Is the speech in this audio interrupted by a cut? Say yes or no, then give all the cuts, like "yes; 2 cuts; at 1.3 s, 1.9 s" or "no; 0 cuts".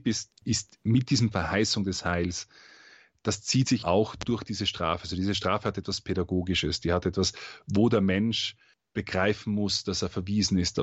yes; 2 cuts; at 1.3 s, 3.8 s